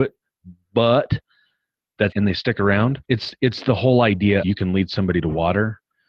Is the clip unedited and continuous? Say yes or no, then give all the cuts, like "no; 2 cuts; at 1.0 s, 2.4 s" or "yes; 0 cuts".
no; 3 cuts; at 2.1 s, 3.0 s, 4.4 s